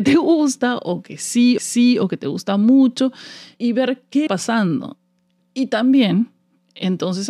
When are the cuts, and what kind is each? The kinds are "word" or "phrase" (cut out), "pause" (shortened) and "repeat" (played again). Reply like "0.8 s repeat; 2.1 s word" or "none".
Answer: 1.6 s repeat; 3.6 s word; 4.3 s phrase